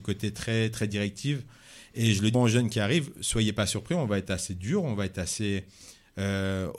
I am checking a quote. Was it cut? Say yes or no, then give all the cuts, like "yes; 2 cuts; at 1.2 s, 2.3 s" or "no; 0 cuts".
yes; 1 cut; at 2.3 s